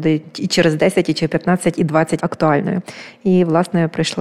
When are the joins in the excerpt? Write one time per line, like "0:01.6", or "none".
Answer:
0:02.2